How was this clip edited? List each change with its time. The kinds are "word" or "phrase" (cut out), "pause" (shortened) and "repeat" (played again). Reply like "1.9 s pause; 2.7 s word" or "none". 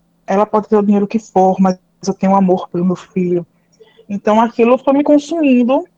none